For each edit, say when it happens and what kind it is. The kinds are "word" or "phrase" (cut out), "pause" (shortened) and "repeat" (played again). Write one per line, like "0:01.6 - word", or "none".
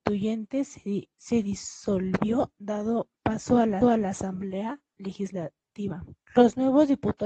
0:01.1 - pause
0:03.2 - pause
0:03.8 - repeat
0:06.2 - pause